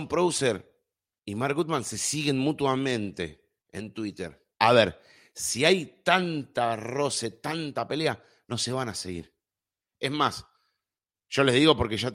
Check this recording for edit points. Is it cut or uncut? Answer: cut